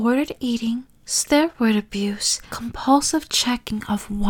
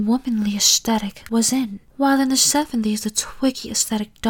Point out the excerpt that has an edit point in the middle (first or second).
first